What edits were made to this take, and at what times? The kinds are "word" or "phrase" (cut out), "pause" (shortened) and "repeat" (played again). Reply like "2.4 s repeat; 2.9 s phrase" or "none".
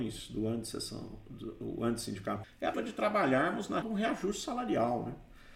2.4 s word; 2.7 s word; 3.8 s word